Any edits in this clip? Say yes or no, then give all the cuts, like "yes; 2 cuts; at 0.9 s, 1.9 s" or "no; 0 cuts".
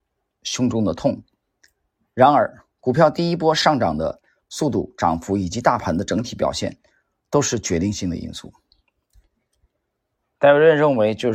no; 0 cuts